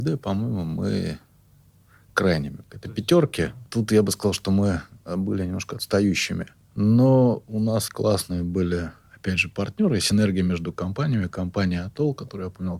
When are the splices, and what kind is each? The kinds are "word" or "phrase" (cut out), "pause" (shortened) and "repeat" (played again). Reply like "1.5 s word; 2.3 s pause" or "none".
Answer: 2.6 s word; 7.9 s word